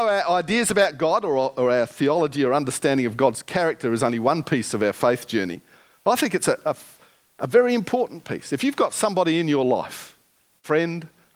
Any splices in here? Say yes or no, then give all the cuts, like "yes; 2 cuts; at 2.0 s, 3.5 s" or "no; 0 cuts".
no; 0 cuts